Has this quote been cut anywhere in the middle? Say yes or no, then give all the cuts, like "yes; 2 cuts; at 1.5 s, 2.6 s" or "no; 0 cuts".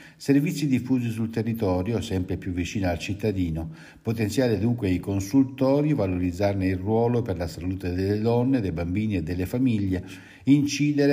no; 0 cuts